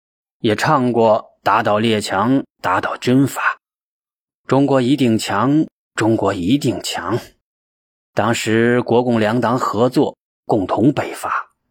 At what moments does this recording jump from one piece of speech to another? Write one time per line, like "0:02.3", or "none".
0:07.4